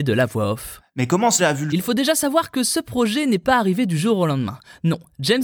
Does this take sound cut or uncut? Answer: cut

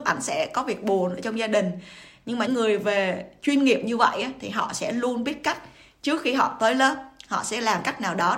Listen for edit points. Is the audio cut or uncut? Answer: cut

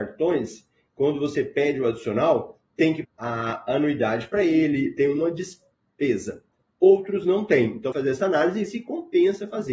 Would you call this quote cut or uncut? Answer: cut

